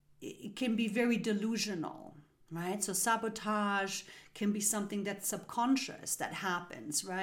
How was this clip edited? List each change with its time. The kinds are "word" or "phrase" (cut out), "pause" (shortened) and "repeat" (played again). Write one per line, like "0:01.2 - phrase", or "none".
none